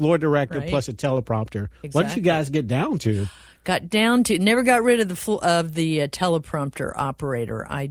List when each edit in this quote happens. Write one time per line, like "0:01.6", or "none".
none